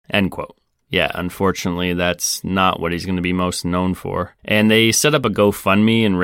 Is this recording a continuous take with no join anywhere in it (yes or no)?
no